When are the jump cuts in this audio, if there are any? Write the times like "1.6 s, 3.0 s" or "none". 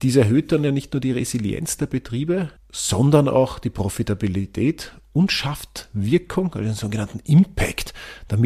2.6 s